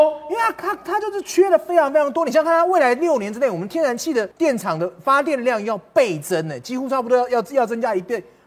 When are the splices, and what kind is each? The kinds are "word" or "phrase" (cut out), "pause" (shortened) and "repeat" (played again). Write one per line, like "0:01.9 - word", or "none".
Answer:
0:04.3 - pause